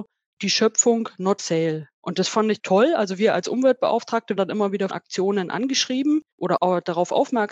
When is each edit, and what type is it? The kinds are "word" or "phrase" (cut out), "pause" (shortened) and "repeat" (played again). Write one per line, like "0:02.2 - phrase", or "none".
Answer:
0:01.4 - word
0:01.9 - pause
0:02.6 - word
0:04.4 - word
0:04.9 - word
0:06.3 - pause